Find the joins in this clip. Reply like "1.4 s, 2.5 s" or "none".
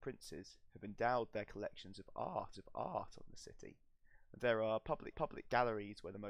2.5 s, 5.1 s